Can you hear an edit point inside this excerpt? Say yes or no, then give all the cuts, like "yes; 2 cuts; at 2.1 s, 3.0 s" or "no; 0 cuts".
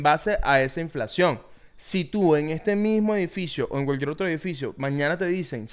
no; 0 cuts